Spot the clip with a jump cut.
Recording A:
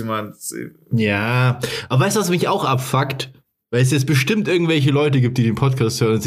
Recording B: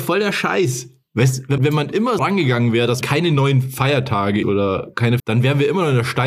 B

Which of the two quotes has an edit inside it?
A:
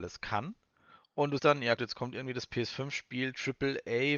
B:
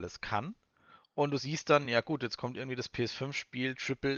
A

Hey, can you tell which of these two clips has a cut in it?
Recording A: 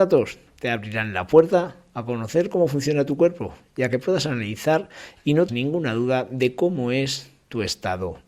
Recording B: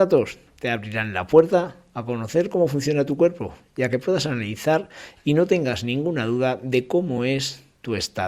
A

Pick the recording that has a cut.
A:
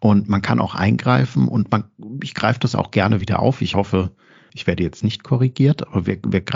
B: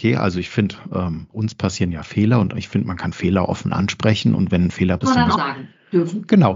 B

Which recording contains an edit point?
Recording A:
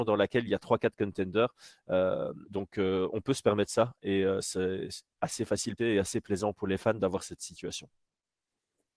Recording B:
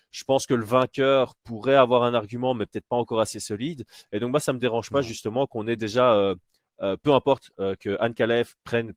A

